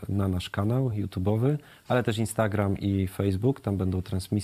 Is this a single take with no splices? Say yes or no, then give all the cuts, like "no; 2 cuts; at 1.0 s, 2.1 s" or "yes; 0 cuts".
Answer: yes; 0 cuts